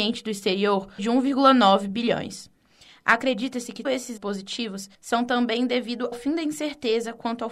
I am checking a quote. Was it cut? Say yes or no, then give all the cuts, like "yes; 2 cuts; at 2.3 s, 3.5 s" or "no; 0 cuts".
yes; 5 cuts; at 1.0 s, 3.8 s, 4.2 s, 4.9 s, 6.1 s